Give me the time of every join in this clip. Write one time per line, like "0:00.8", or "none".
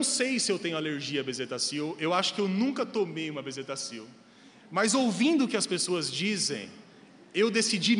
none